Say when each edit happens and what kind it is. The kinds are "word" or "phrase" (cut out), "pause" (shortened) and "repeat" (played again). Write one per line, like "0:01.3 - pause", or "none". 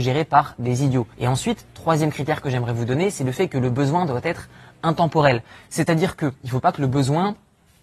0:01.1 - pause